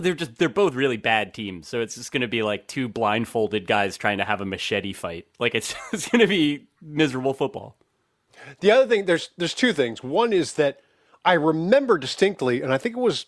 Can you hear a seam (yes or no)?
no